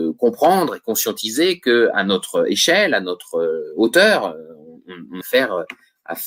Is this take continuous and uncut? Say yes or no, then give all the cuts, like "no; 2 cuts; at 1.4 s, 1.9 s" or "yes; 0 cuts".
no; 1 cut; at 5.2 s